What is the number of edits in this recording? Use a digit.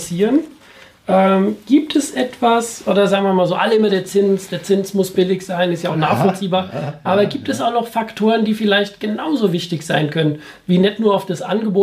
0